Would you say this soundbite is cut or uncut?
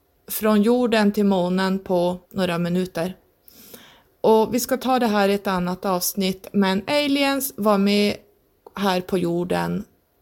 cut